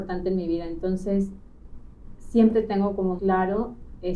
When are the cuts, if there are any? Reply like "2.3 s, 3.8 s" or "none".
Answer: 3.2 s

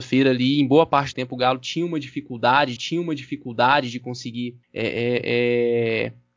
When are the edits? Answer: 1.1 s, 2.8 s, 4.6 s

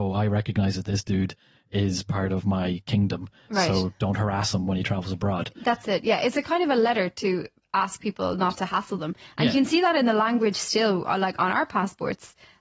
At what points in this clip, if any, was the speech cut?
none

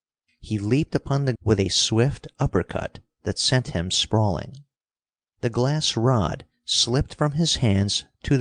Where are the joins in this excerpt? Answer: 1.4 s

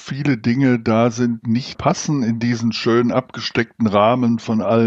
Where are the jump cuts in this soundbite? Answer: 1.4 s, 1.7 s

